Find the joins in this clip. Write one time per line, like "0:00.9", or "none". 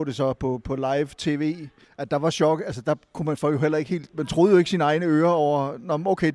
0:01.8

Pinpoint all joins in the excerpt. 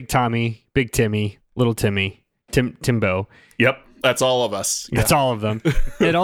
none

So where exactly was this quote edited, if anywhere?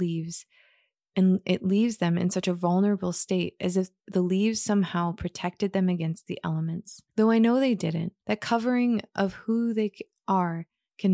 0:04.0
0:07.1
0:08.2

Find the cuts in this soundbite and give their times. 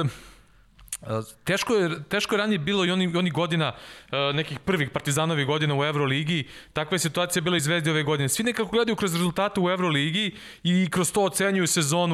none

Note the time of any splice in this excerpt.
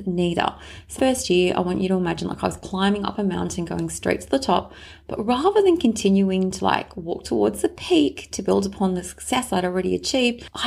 0:01.0

